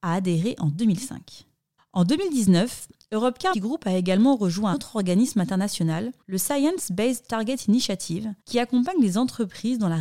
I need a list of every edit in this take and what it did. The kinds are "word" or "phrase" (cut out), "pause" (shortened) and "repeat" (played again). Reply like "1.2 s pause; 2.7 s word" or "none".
1.8 s pause; 3.5 s word; 4.7 s word; 6.2 s pause; 8.4 s pause